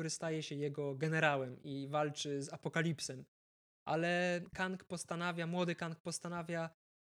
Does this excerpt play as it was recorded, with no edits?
yes; 0 cuts

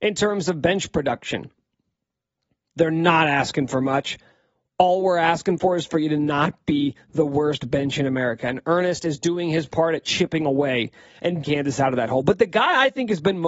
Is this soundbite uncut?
no; 1 cut; at 11.4 s

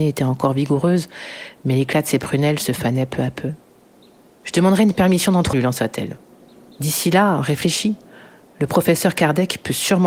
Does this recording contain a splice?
yes; 1 cut; at 5.5 s

